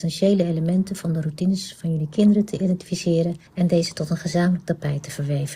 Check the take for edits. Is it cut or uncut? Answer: cut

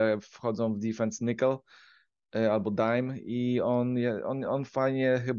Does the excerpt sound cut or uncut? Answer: uncut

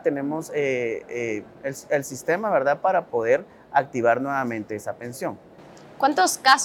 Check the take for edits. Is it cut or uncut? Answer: uncut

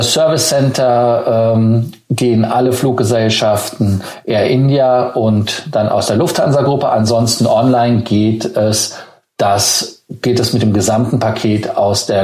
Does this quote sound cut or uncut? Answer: uncut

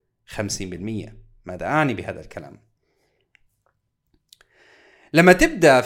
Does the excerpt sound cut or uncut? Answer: uncut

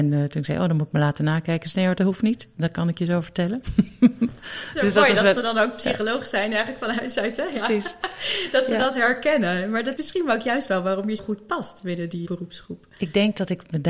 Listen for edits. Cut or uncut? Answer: cut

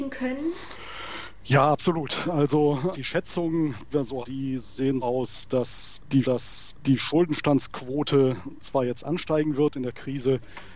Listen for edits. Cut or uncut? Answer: cut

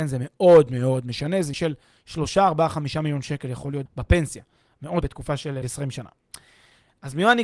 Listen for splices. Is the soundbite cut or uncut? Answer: cut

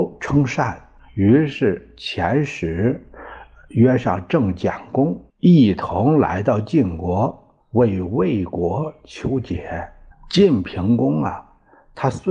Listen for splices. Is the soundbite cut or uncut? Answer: cut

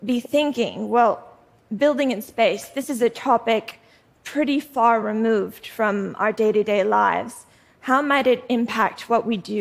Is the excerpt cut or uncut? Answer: uncut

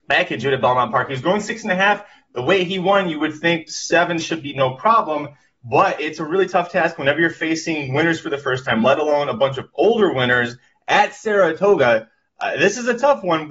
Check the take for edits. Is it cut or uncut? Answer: uncut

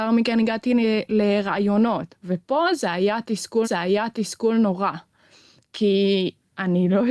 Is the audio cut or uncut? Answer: cut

